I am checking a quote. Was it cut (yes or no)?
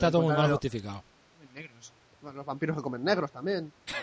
no